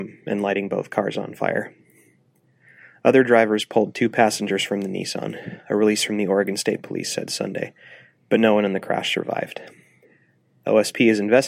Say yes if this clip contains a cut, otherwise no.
no